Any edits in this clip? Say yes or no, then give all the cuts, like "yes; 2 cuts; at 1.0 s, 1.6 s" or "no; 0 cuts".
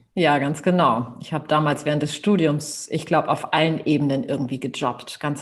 no; 0 cuts